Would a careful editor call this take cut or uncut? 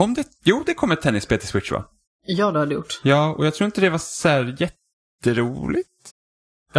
uncut